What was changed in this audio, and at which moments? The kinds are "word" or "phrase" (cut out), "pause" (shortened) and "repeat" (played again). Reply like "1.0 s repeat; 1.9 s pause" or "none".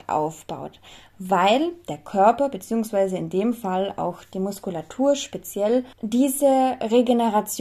5.9 s pause